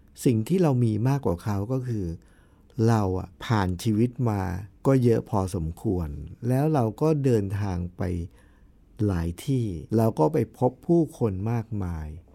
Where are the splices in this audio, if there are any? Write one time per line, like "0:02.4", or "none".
0:03.3
0:04.7
0:09.9